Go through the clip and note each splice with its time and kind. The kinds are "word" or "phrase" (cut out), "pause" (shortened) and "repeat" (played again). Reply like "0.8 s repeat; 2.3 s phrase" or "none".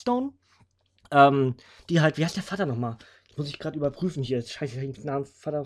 none